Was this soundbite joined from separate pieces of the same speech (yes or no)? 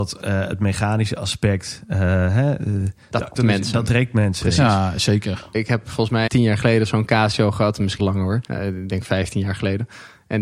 yes